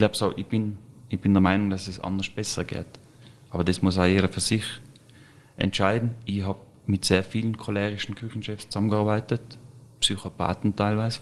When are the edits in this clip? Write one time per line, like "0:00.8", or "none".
none

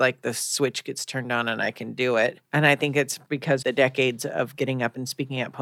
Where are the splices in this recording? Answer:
0:02.4
0:03.6

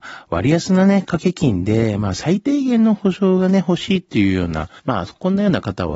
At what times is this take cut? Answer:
0:04.8

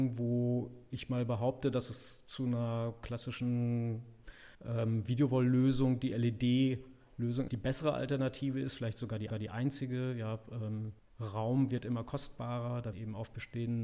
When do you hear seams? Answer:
0:04.5
0:07.5
0:09.3
0:11.0
0:12.9

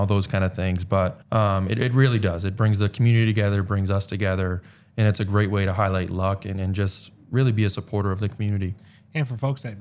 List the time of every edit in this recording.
0:01.2

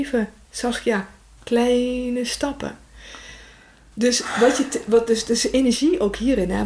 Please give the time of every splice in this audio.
none

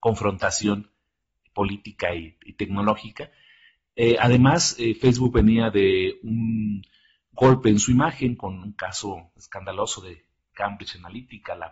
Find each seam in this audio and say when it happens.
none

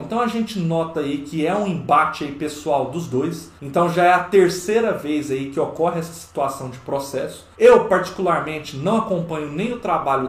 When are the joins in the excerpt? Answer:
0:03.6
0:07.5

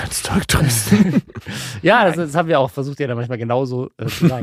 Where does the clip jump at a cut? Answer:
none

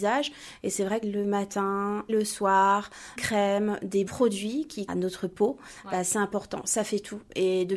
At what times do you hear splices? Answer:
0:01.0
0:02.1
0:03.2
0:04.1
0:04.9

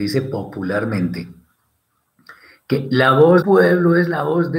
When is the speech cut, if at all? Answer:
0:03.4

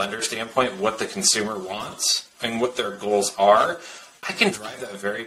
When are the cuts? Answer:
none

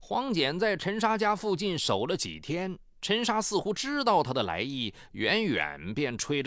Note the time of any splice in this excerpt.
0:02.9

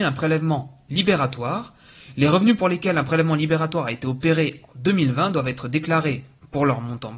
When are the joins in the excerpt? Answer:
none

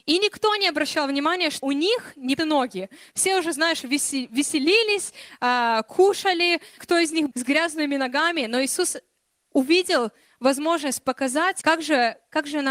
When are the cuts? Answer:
0:01.6
0:02.4
0:06.8
0:07.3
0:11.6

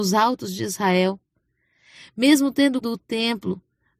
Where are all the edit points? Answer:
0:02.8

